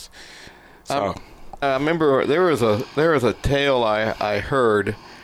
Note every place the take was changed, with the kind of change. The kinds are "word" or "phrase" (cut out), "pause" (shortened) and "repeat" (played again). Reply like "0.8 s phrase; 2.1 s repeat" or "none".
1.6 s word